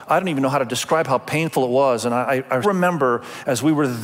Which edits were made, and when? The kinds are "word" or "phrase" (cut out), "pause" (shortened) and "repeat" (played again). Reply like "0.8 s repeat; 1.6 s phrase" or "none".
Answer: 2.6 s word